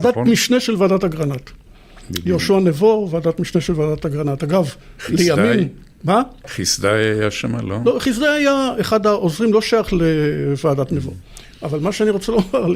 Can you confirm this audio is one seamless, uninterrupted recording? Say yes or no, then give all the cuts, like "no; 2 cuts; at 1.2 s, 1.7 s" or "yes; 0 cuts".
yes; 0 cuts